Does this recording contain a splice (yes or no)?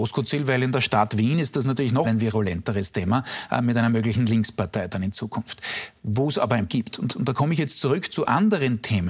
yes